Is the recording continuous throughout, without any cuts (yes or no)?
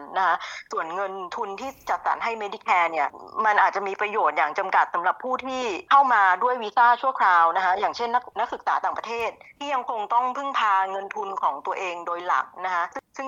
yes